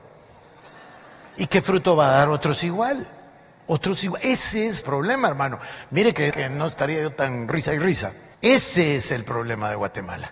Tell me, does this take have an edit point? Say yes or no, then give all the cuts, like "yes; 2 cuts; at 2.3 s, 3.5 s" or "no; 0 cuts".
yes; 3 cuts; at 4.8 s, 6.3 s, 8.3 s